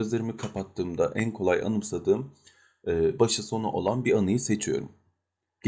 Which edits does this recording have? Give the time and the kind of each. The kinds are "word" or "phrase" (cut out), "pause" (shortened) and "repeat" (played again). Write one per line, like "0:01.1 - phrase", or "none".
none